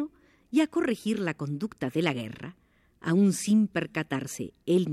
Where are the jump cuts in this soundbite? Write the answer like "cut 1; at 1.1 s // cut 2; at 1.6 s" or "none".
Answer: none